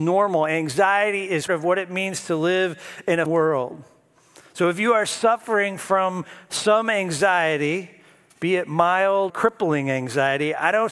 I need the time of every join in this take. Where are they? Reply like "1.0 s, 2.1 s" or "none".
1.5 s, 3.3 s, 9.3 s